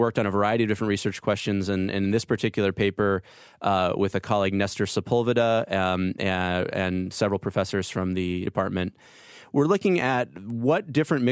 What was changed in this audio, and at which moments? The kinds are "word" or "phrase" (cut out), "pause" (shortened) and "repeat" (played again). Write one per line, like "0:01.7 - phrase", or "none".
0:08.5 - phrase

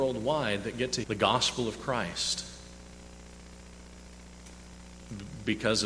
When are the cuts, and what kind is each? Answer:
0:01.0 - word

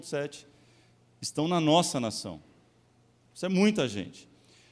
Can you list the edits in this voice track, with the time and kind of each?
none

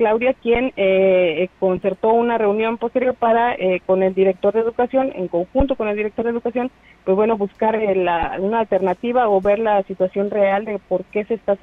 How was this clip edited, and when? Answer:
none

